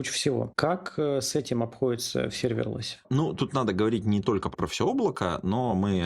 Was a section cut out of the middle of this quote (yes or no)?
yes